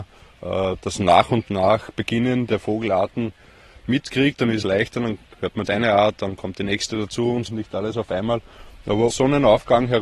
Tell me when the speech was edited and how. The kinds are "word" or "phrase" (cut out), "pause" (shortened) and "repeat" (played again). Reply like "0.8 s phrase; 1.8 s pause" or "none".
2.6 s word; 4.6 s word; 5.6 s word; 7.5 s word; 9.1 s word